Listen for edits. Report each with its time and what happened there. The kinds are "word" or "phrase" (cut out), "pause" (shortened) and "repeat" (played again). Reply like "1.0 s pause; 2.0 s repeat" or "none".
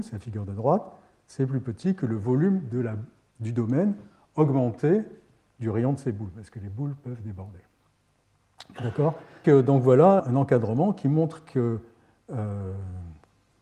9.4 s word; 10.2 s word

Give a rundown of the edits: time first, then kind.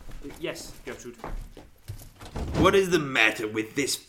none

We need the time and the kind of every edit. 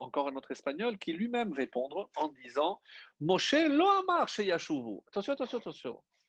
1.5 s word

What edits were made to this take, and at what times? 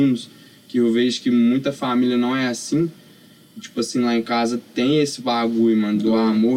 none

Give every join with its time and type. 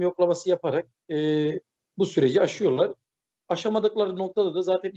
none

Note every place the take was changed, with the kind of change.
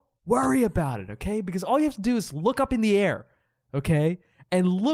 none

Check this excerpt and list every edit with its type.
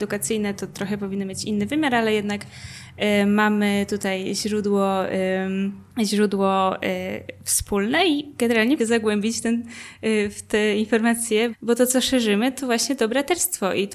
5.9 s pause; 8.8 s phrase; 11.5 s word

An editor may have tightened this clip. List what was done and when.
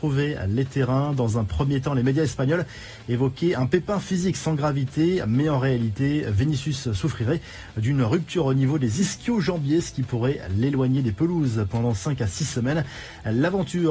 none

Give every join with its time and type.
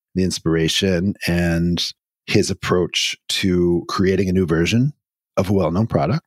none

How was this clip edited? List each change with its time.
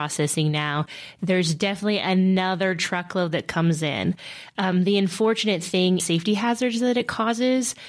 6.0 s phrase

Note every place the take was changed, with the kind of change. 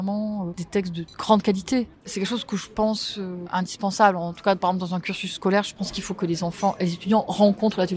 2.0 s pause

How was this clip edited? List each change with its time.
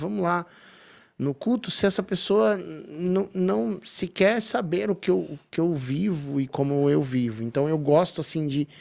none

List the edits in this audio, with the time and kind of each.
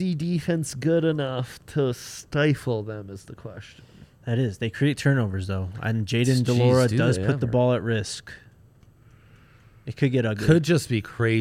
none

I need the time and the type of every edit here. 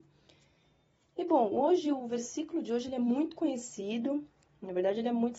none

